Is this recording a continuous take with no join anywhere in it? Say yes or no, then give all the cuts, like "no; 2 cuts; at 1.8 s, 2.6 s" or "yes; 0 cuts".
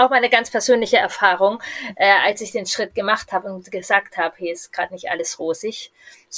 yes; 0 cuts